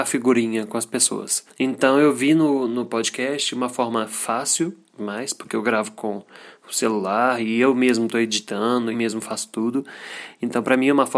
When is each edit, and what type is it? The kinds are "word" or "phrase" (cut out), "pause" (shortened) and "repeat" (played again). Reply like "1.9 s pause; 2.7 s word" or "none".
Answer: 8.9 s phrase